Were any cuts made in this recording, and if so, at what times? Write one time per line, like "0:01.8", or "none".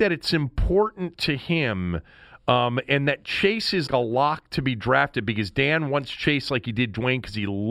0:03.9